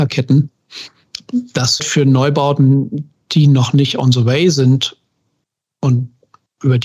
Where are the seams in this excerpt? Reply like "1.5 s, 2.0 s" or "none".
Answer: 1.8 s